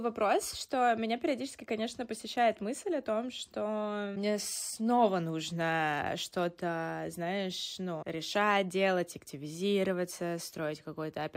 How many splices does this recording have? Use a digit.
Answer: 0